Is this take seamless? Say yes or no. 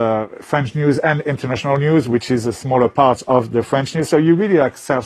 yes